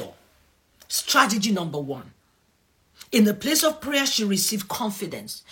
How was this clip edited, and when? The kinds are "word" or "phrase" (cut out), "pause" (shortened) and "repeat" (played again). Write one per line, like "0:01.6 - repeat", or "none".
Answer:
none